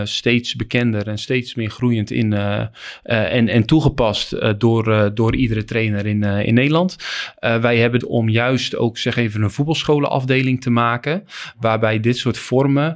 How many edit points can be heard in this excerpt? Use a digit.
1